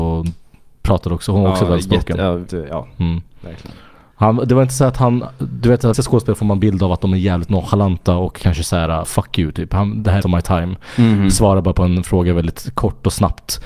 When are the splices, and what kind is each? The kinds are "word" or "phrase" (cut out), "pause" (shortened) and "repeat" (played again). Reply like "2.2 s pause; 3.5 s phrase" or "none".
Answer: 2.5 s word; 5.9 s word; 9.0 s word; 10.2 s word